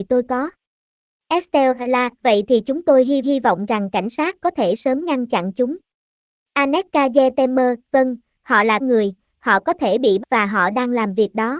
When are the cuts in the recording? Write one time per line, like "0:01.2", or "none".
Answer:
0:03.2
0:08.8
0:10.2